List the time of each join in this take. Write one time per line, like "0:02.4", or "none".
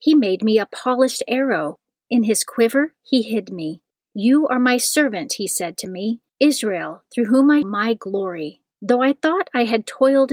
0:03.9
0:06.3
0:07.6
0:08.7